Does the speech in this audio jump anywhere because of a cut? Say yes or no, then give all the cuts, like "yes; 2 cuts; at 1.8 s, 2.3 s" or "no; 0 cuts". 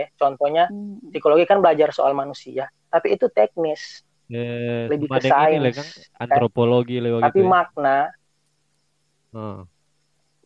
yes; 1 cut; at 4.1 s